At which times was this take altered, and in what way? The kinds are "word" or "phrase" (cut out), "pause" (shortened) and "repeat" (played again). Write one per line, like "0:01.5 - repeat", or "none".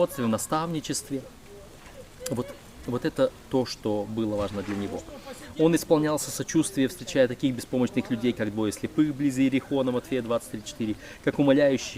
none